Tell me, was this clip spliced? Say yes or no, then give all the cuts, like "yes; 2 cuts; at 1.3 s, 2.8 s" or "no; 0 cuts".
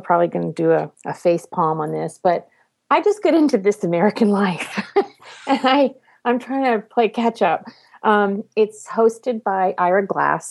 no; 0 cuts